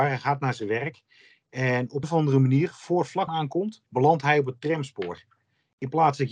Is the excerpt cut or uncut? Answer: cut